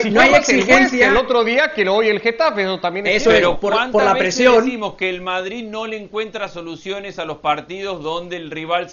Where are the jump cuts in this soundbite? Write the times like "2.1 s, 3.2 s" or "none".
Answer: none